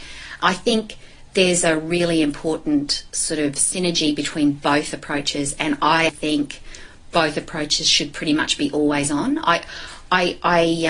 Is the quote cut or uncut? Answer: cut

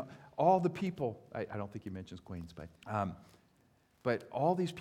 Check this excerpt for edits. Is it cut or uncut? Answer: cut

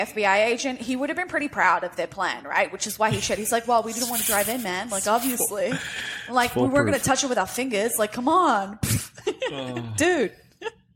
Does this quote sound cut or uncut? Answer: uncut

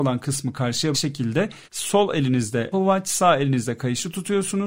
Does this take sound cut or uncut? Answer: cut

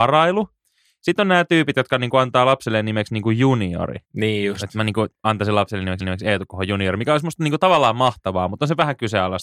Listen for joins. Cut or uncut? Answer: cut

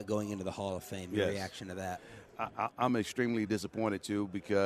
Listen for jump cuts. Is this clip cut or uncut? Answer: uncut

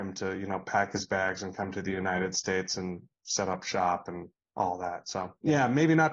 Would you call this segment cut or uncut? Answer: uncut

